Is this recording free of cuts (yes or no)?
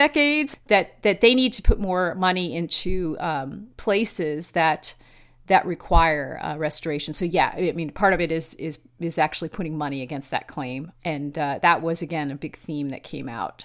yes